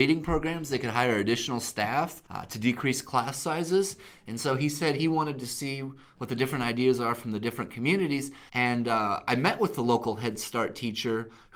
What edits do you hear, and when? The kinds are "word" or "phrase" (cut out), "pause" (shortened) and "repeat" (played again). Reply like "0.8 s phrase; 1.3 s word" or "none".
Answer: 2.3 s pause; 8.5 s pause